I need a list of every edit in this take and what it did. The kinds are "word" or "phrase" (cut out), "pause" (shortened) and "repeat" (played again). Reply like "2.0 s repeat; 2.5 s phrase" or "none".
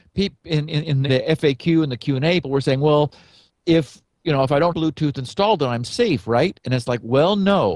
1.1 s word; 2.4 s word; 3.5 s word; 4.7 s word